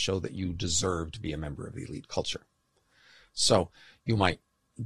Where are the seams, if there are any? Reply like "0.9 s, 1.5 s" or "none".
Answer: none